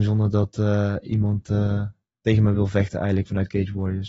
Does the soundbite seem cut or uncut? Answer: uncut